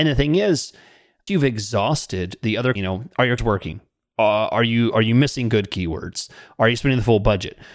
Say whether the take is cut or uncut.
cut